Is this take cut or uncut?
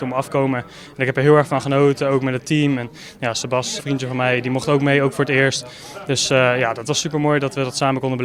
cut